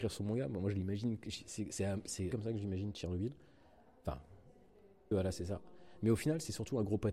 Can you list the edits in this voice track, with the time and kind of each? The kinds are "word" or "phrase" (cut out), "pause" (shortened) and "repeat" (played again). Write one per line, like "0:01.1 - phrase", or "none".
0:02.3 - word
0:05.1 - word